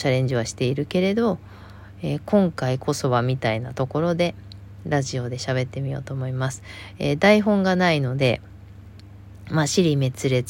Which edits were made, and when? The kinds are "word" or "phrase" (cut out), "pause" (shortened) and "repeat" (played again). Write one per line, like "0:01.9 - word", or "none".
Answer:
none